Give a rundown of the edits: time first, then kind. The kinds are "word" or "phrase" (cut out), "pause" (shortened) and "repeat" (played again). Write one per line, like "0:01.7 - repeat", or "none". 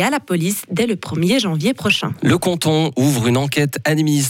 none